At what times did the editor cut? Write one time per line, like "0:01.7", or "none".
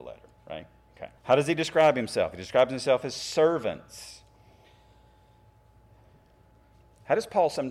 0:01.2